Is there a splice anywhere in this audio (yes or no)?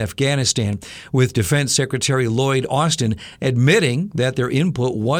no